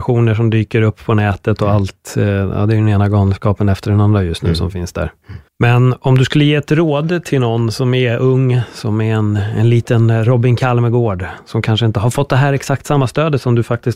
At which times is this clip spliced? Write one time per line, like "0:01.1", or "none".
0:05.5

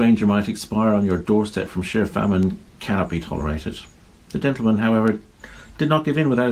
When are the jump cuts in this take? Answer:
none

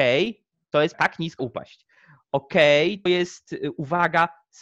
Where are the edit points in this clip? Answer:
0:00.9
0:01.4
0:03.1

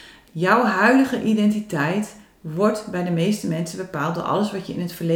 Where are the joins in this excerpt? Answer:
none

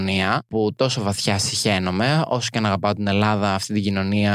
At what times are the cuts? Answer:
none

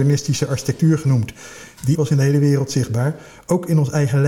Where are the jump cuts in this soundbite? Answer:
0:01.9

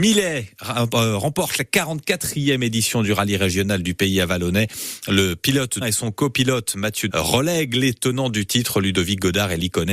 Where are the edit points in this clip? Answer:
0:05.8
0:07.1

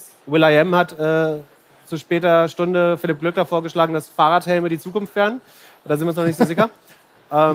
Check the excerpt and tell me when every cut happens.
none

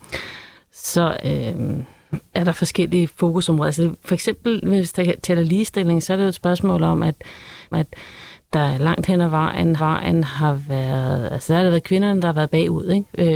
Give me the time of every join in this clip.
0:01.2
0:07.7
0:09.8

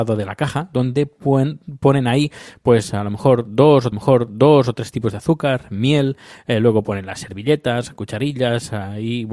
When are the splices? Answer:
0:03.9

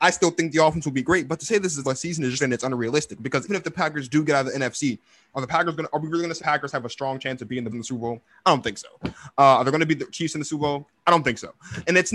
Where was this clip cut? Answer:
0:01.8
0:02.4
0:03.5
0:06.4
0:07.7

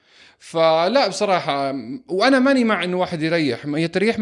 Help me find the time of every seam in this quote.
none

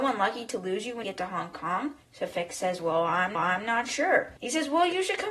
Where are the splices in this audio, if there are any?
0:01.0
0:02.0
0:03.3
0:04.4

